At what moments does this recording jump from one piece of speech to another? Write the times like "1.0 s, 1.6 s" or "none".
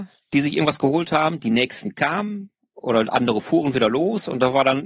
none